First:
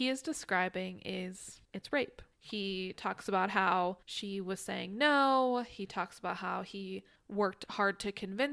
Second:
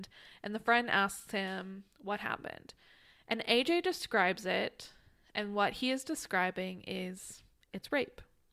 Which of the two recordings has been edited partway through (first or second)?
first